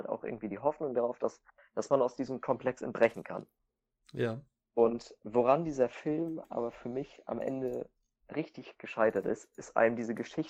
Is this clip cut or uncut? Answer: uncut